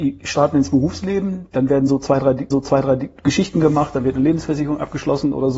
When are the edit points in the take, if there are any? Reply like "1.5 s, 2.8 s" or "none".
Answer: 2.5 s